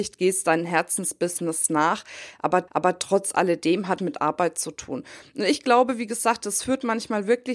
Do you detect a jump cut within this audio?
yes; 2 cuts; at 2.7 s, 4.0 s

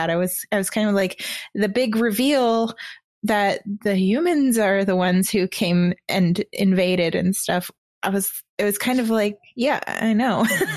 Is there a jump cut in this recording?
no; 0 cuts

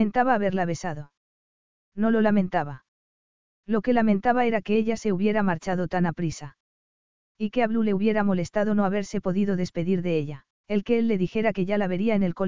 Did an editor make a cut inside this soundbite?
yes; 1 cut; at 10.6 s

